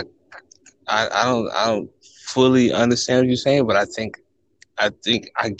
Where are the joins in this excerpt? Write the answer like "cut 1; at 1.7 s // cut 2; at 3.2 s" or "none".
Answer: none

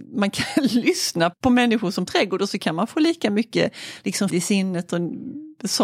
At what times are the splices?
cut 1; at 1.3 s // cut 2; at 2.1 s // cut 3; at 4.3 s

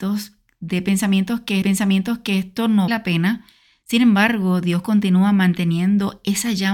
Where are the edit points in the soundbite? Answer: cut 1; at 1.6 s // cut 2; at 2.9 s

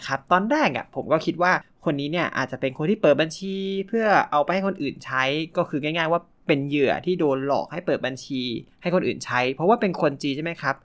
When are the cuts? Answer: cut 1; at 8.7 s

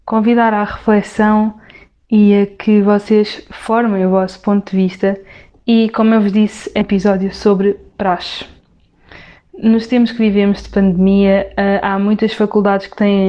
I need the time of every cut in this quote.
cut 1; at 6.8 s

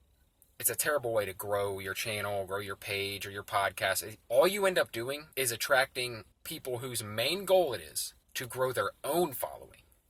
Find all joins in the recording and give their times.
cut 1; at 4.2 s // cut 2; at 5.3 s // cut 3; at 6.3 s // cut 4; at 8.2 s

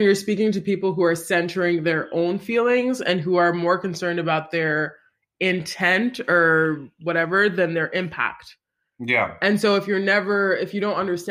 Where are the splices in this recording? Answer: none

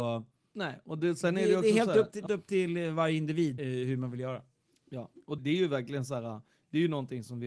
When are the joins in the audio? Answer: cut 1; at 2.3 s // cut 2; at 3.6 s // cut 3; at 5.4 s

